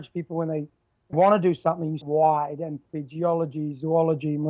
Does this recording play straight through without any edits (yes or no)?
no